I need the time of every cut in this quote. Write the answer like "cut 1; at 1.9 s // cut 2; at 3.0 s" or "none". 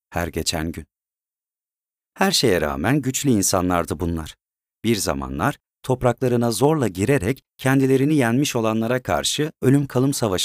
none